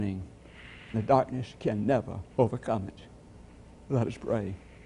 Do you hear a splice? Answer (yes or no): yes